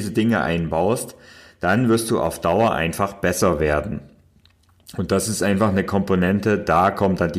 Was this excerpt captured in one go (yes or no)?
yes